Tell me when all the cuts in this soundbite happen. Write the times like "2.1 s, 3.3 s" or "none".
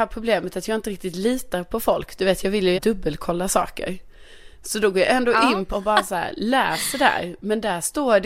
2.7 s, 5.7 s